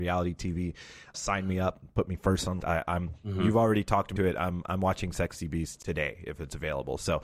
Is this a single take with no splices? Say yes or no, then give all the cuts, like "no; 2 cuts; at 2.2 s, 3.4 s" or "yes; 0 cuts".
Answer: no; 4 cuts; at 1.1 s, 2.6 s, 4.2 s, 5.8 s